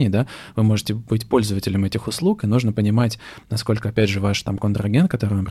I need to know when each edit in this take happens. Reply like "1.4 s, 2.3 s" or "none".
none